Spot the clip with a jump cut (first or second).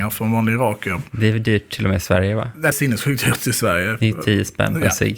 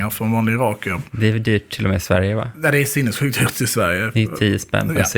first